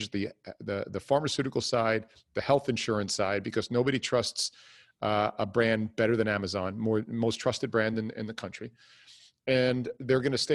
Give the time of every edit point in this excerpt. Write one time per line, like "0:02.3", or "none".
none